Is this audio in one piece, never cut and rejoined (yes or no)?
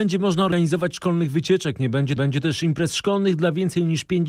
no